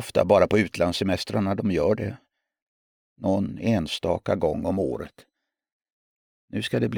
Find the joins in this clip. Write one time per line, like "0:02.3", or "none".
none